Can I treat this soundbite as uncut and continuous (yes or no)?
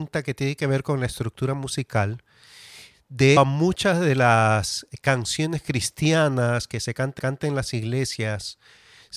no